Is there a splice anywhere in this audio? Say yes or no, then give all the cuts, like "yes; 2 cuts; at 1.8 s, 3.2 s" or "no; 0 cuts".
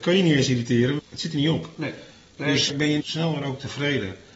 yes; 3 cuts; at 1.0 s, 2.7 s, 3.0 s